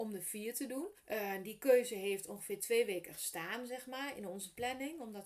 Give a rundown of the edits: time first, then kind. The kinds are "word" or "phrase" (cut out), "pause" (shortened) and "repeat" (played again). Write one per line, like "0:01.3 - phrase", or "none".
0:01.0 - pause